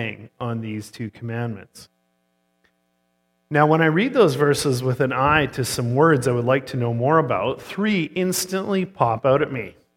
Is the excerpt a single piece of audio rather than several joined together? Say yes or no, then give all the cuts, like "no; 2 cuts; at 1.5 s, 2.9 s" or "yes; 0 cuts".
yes; 0 cuts